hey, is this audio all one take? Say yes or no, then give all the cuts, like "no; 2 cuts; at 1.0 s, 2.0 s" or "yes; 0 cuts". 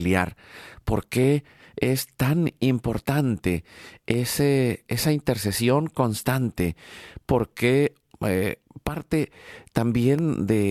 yes; 0 cuts